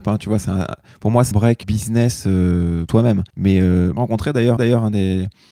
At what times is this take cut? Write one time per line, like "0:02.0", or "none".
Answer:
0:01.3
0:01.6
0:02.9
0:03.3
0:04.0
0:04.6

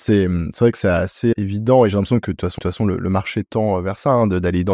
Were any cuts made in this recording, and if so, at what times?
0:01.3
0:02.6

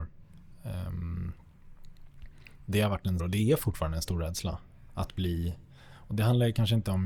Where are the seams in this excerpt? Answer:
0:03.2

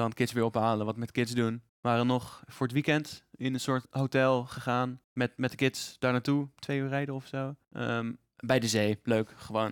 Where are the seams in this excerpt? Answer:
0:01.7
0:03.8
0:05.0
0:07.6

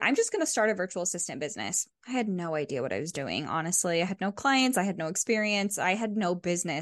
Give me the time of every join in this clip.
none

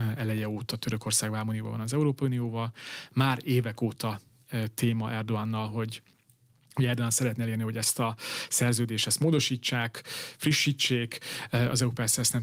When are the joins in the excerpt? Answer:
none

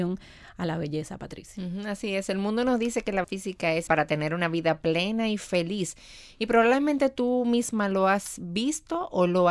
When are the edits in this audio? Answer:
0:03.2
0:03.9

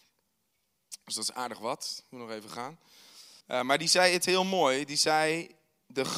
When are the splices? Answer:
0:03.4

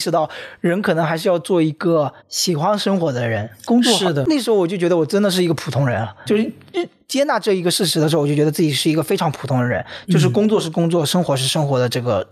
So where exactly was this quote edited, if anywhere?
0:02.2
0:06.3

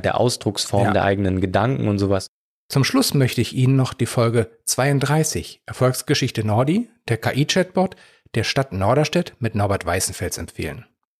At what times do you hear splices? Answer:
none

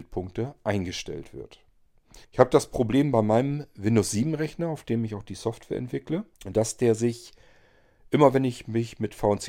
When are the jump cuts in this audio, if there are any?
0:02.2
0:06.3

